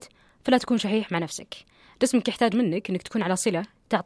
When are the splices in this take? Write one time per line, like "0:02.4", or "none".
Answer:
none